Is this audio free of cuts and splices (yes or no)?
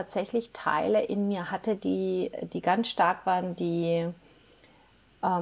yes